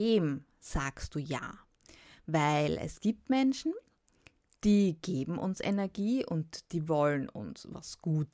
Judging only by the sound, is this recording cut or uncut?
uncut